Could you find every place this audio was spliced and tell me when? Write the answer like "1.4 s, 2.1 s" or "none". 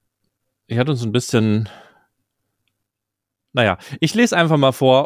none